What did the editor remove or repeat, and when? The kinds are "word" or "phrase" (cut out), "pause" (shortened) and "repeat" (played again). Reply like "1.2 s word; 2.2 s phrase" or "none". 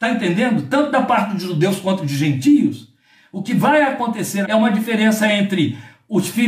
4.4 s word